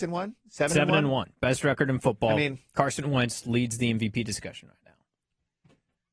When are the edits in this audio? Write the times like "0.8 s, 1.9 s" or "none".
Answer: none